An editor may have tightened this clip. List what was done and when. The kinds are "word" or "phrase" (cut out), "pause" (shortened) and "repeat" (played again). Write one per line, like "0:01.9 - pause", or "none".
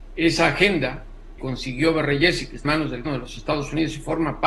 0:01.4 - word
0:02.6 - word
0:03.0 - word